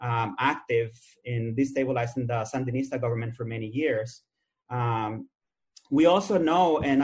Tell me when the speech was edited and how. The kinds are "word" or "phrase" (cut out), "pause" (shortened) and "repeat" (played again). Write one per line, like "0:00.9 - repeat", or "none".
none